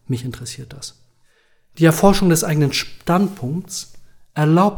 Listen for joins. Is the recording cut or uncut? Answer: uncut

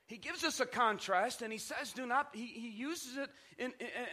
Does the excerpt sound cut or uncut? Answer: uncut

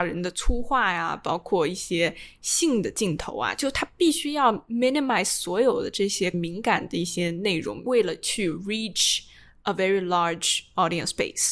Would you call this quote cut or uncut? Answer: uncut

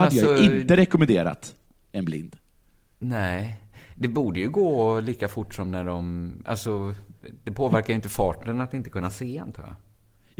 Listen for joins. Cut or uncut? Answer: uncut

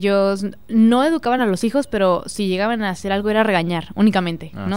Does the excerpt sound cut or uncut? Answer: uncut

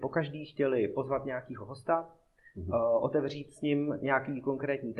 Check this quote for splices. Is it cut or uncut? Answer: uncut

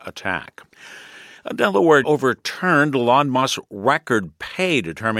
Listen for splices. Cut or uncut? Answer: cut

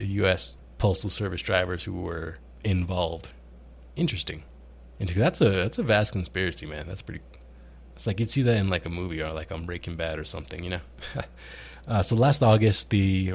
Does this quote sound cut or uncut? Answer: uncut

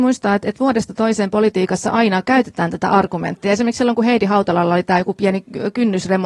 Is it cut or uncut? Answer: uncut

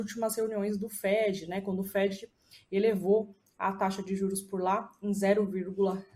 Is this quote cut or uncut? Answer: uncut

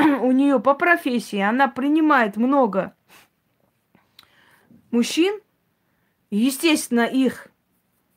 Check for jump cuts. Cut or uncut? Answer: uncut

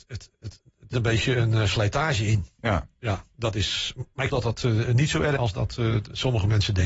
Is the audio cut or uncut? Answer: cut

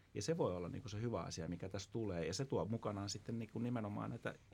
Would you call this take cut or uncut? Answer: uncut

